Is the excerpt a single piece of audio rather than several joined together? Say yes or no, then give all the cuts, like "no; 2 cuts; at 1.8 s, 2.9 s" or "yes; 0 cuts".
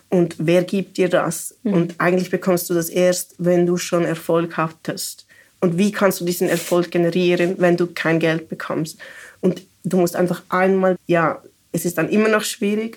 no; 1 cut; at 11.0 s